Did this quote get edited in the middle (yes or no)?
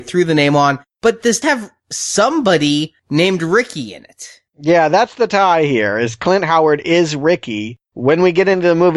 yes